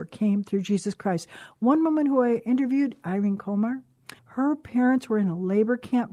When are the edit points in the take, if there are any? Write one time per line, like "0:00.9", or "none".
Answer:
0:04.2